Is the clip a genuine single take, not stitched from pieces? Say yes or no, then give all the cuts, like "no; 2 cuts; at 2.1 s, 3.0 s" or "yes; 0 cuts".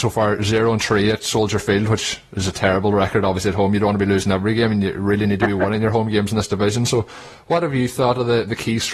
yes; 0 cuts